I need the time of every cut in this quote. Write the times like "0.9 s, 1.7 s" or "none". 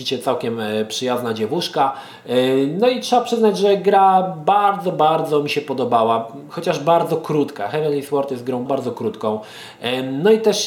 8.7 s